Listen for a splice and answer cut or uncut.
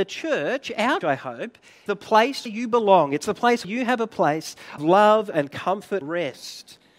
cut